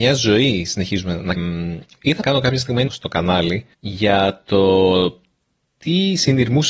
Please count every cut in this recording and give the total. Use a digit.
4